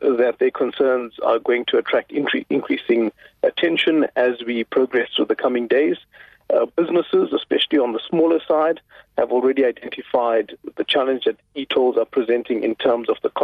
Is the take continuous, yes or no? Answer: yes